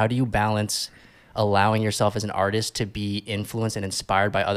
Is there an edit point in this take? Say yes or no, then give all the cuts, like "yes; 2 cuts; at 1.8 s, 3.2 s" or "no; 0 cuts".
no; 0 cuts